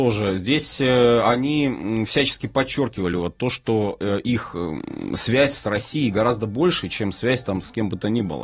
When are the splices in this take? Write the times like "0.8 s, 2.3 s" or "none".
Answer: none